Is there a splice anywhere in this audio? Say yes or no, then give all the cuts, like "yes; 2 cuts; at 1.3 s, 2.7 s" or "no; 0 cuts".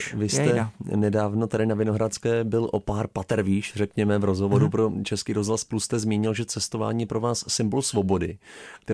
no; 0 cuts